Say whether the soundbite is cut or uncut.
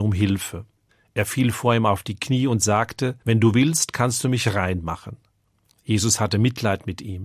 cut